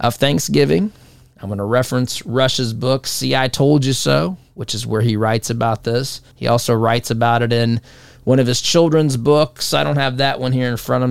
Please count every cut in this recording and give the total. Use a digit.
1